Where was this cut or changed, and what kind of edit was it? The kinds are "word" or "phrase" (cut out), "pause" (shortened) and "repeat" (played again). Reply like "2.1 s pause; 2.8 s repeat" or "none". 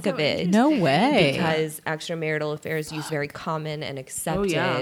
3.1 s phrase